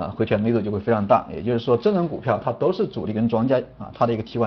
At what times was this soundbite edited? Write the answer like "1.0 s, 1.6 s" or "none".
none